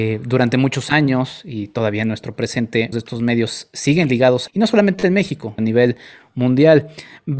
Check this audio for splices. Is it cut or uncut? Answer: cut